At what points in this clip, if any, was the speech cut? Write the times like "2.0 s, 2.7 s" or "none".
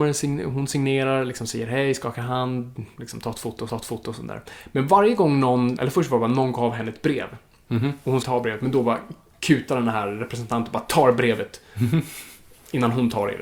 3.7 s, 5.8 s, 8.2 s